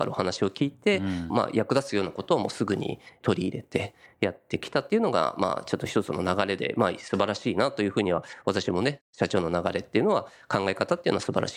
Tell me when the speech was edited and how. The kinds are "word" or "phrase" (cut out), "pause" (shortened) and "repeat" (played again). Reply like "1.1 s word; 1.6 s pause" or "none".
none